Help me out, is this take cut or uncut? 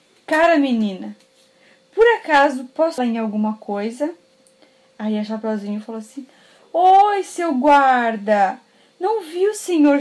cut